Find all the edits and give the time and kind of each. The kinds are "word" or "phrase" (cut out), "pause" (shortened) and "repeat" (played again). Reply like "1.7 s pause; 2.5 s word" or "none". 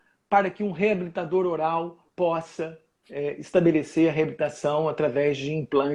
2.1 s pause